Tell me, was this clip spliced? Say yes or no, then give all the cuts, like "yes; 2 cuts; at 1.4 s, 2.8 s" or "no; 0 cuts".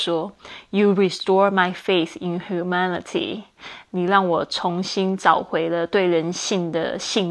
no; 0 cuts